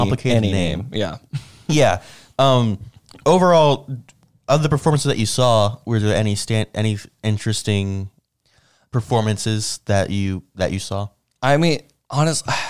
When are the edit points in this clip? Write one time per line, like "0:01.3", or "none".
none

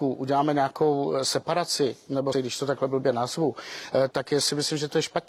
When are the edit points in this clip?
0:02.3
0:04.1

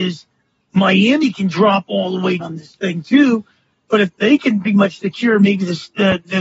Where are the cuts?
0:02.4
0:04.1
0:04.6

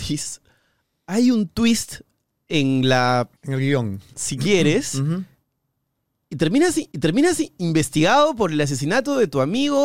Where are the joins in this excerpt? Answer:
0:03.4
0:06.9

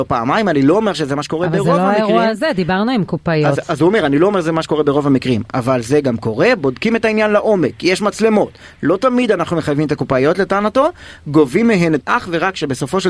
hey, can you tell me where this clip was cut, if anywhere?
0:12.0

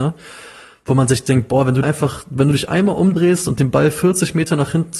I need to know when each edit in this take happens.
0:01.8

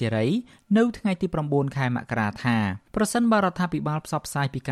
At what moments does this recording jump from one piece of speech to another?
0:02.9

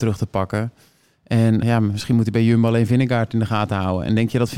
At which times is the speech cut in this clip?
0:01.6

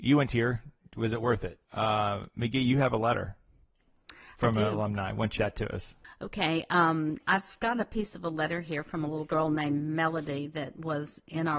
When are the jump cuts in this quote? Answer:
0:01.6
0:05.4

